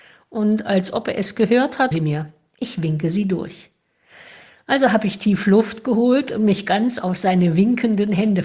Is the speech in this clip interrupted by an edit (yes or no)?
yes